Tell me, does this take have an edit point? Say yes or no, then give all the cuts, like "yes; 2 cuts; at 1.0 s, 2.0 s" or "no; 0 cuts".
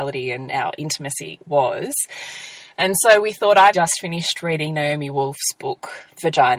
yes; 1 cut; at 3.7 s